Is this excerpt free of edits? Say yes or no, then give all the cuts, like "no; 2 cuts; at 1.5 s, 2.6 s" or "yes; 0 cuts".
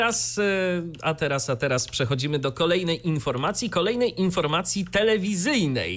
yes; 0 cuts